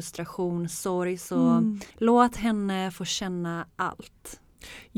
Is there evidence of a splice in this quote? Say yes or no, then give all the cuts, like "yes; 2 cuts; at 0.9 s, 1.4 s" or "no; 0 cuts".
yes; 1 cut; at 1.9 s